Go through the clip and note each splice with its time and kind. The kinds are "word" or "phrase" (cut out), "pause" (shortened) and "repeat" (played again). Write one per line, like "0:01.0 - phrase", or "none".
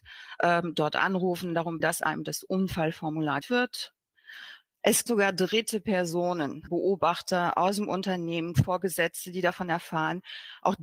0:01.8 - word
0:03.4 - word
0:05.1 - word
0:06.7 - word
0:08.5 - word